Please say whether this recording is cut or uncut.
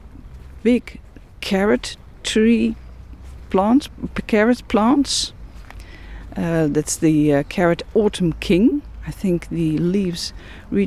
uncut